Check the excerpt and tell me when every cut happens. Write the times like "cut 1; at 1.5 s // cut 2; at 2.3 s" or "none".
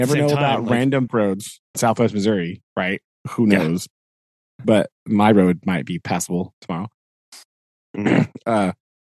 cut 1; at 1.1 s // cut 2; at 1.7 s // cut 3; at 3.1 s